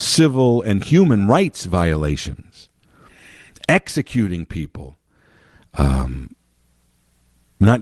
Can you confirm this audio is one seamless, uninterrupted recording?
yes; 0 cuts

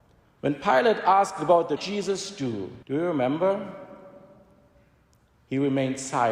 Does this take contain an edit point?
yes; 2 cuts; at 1.8 s, 2.8 s

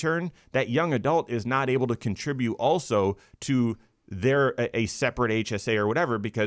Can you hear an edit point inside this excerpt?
no; 0 cuts

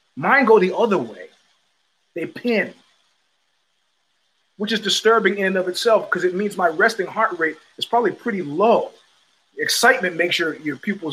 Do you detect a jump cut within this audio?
no; 0 cuts

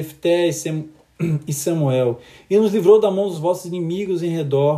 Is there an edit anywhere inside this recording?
no; 0 cuts

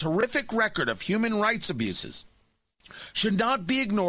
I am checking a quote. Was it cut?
no; 0 cuts

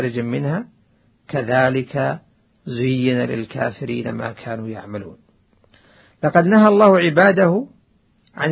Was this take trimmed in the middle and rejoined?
no; 0 cuts

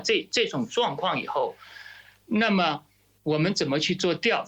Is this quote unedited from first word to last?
yes; 0 cuts

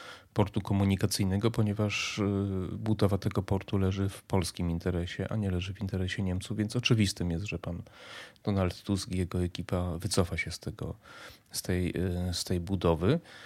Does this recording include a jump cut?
no; 0 cuts

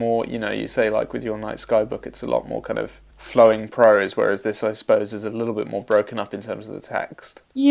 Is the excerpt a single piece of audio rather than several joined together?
no; 1 cut; at 3.1 s

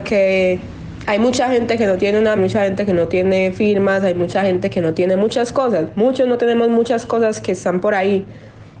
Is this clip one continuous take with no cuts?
no; 1 cut; at 2.4 s

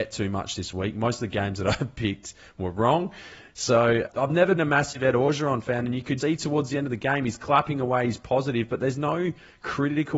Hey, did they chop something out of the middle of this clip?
yes; 3 cuts; at 4.1 s, 4.6 s, 6.2 s

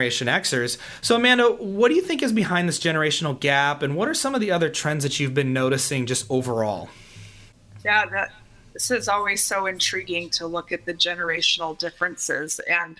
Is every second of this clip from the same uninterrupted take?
yes; 0 cuts

